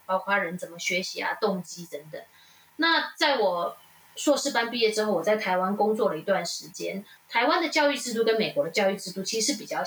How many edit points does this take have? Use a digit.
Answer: 0